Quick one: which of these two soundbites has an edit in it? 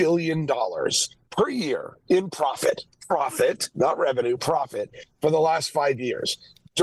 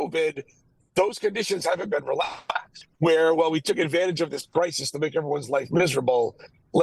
first; 1 cut; at 1.2 s

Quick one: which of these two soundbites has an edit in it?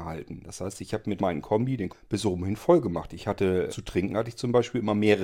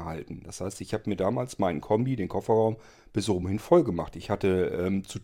first; 3 cuts; at 1.2 s, 1.9 s, 3.7 s

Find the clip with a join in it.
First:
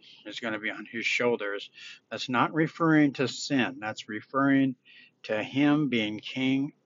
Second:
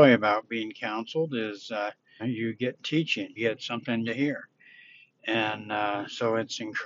second; 3 cuts; at 2.2 s, 3.4 s, 4.1 s

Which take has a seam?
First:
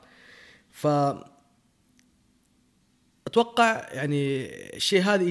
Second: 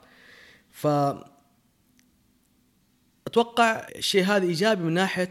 second; 1 cut; at 3.9 s

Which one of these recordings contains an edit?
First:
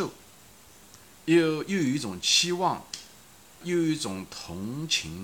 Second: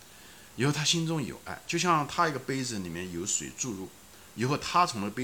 first; 1 cut; at 3.6 s

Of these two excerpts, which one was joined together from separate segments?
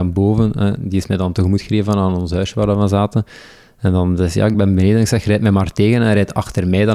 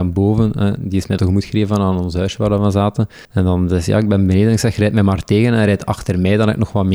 second; 2 cuts; at 1.2 s, 3.2 s

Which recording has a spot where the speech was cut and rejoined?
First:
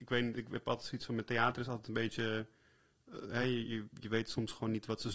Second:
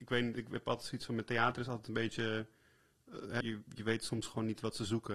second; 1 cut; at 3.4 s

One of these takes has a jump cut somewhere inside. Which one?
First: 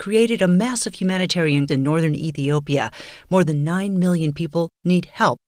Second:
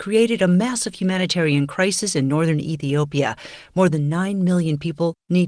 first; 1 cut; at 1.7 s

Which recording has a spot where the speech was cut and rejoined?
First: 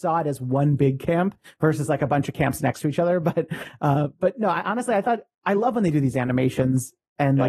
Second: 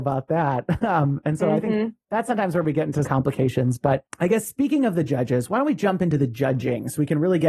second; 1 cut; at 3.0 s

